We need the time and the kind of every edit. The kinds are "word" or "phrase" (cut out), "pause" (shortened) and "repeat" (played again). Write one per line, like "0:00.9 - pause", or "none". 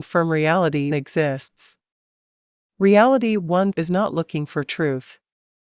0:00.9 - word
0:03.7 - word